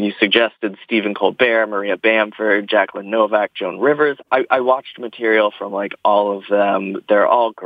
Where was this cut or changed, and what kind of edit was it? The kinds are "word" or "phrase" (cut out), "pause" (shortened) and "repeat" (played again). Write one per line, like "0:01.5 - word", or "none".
none